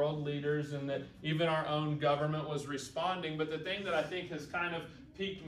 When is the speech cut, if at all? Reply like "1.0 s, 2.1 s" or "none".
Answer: none